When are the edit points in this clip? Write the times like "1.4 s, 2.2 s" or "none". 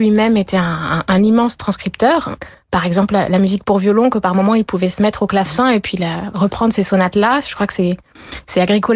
none